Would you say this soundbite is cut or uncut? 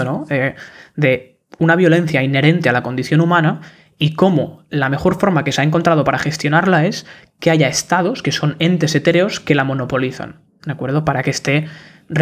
uncut